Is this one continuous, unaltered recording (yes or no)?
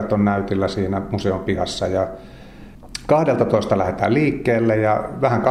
yes